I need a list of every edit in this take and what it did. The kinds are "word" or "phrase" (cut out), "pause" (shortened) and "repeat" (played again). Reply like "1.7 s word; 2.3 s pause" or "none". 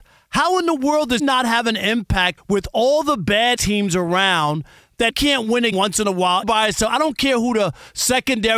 1.2 s word; 2.4 s word; 3.6 s word; 5.1 s word; 5.7 s word; 6.4 s word